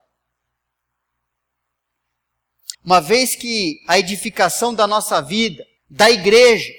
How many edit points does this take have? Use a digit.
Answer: 2